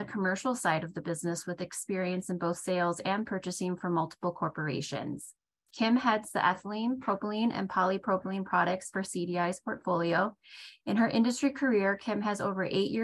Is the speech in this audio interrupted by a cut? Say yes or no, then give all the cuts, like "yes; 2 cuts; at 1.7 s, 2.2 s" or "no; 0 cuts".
no; 0 cuts